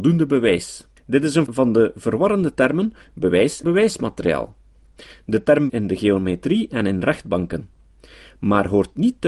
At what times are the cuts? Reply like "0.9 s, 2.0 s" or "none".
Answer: 1.0 s, 1.5 s, 3.6 s, 5.7 s